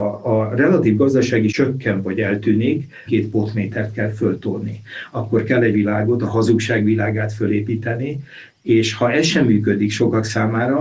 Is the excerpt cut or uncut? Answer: cut